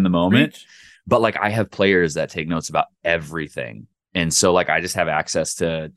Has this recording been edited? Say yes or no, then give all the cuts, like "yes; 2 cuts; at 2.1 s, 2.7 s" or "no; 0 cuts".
no; 0 cuts